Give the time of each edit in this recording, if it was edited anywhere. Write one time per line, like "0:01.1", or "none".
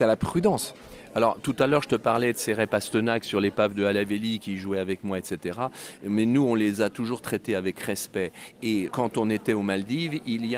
0:08.9